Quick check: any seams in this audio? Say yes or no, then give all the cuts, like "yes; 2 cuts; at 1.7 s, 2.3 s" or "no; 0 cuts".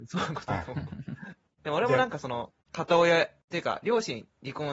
no; 0 cuts